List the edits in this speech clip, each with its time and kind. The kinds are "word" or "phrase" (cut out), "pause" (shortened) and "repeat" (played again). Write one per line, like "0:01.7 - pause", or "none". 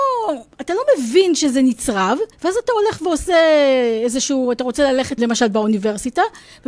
0:02.3 - pause
0:05.2 - word